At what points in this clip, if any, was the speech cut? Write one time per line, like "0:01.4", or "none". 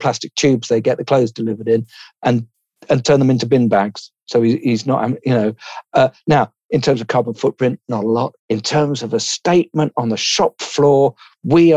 0:02.8
0:08.4